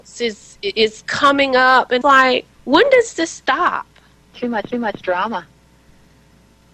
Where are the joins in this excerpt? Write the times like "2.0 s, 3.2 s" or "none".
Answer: 2.0 s, 2.5 s, 4.7 s